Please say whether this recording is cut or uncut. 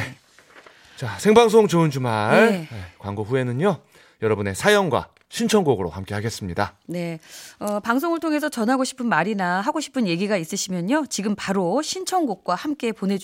uncut